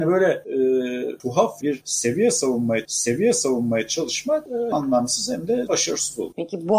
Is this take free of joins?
no; 4 cuts; at 1.6 s, 2.8 s, 4.7 s, 5.7 s

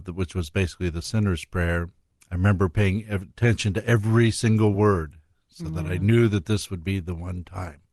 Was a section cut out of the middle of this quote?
no; 0 cuts

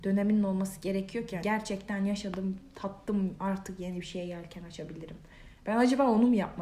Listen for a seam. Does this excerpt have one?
yes; 1 cut; at 1.4 s

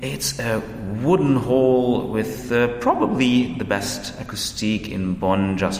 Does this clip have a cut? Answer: no; 0 cuts

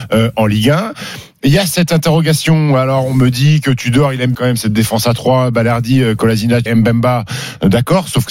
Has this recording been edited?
yes; 2 cuts; at 4.3 s, 6.7 s

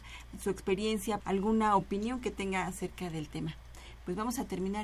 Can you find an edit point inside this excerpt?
yes; 1 cut; at 1.2 s

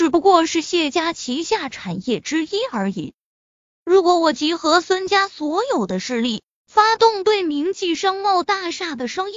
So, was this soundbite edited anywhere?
yes; 1 cut; at 3.4 s

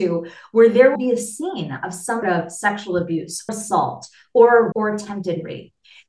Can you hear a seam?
yes; 4 cuts; at 1.0 s, 2.2 s, 3.5 s, 4.7 s

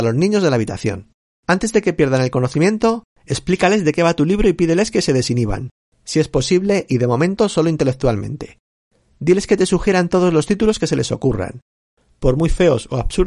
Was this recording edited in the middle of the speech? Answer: yes; 1 cut; at 1.3 s

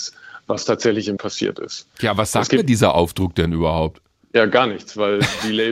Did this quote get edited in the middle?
yes; 1 cut; at 1.2 s

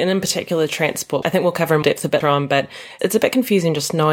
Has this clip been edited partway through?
yes; 4 cuts; at 1.2 s, 1.8 s, 2.2 s, 3.0 s

